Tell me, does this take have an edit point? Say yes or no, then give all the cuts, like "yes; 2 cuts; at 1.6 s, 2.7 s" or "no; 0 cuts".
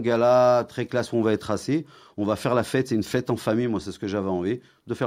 no; 0 cuts